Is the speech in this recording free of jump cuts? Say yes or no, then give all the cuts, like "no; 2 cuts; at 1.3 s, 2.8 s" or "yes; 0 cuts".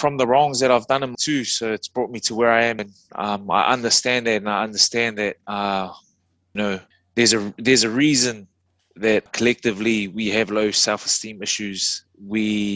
no; 5 cuts; at 1.1 s, 2.8 s, 6.6 s, 6.9 s, 9.3 s